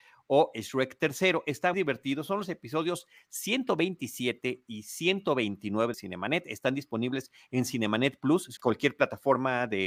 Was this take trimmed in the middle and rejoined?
yes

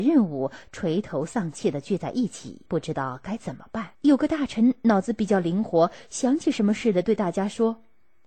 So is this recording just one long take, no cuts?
no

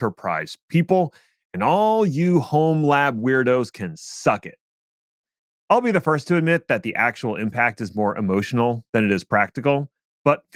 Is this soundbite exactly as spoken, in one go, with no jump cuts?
yes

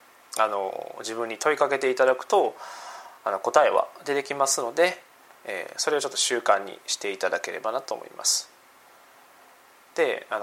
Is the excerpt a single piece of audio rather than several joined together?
yes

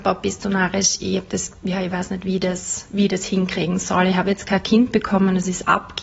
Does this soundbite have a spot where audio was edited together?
no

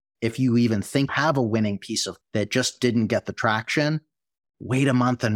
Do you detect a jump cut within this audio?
yes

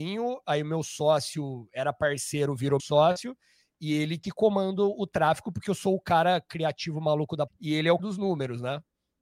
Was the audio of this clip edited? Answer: yes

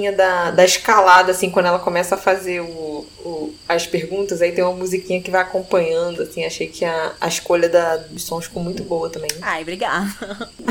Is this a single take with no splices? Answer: yes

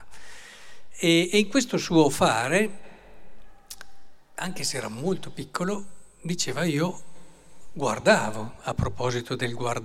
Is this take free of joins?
yes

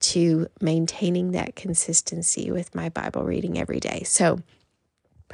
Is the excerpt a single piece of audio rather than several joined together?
yes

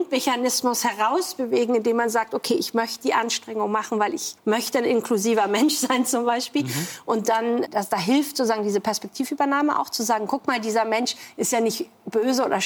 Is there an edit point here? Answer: yes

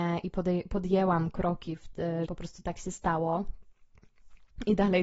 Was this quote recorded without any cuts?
no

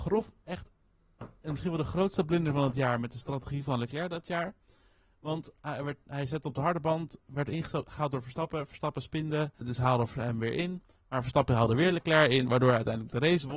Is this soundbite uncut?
no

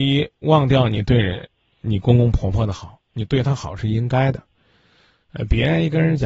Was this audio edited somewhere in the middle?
no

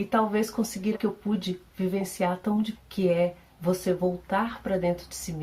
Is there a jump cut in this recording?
yes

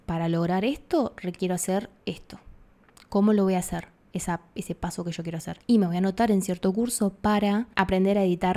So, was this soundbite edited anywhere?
no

